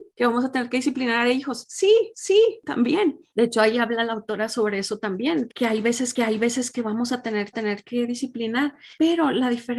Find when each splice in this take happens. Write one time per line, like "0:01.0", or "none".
0:02.1
0:06.2
0:07.5